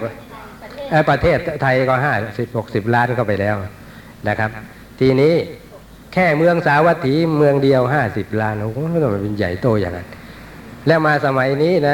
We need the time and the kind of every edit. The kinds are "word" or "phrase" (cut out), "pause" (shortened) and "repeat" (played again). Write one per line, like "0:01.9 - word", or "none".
none

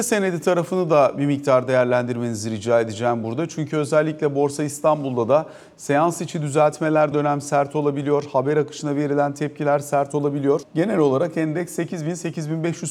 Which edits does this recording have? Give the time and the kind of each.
0:07.1 - word
0:10.6 - word

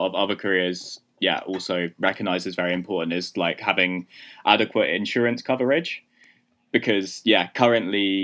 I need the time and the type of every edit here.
none

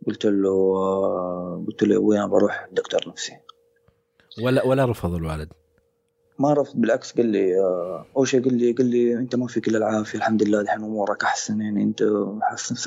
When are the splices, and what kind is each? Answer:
none

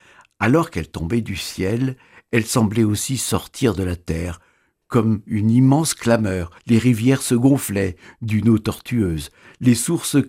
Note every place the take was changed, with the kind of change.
0:06.6 - pause

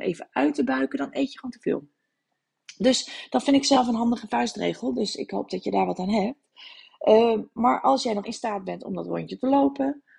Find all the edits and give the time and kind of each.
0:08.2 - word

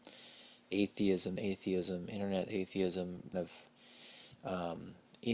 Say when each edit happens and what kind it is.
0:01.4 - word
0:03.3 - word

